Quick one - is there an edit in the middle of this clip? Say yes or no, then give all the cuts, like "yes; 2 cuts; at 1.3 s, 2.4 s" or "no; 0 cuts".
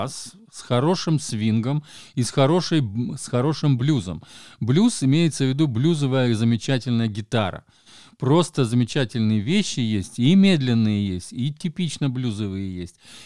no; 0 cuts